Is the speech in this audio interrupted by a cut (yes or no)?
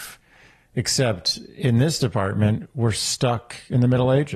no